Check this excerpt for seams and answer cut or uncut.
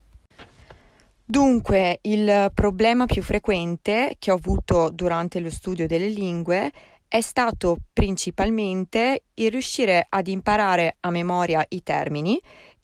uncut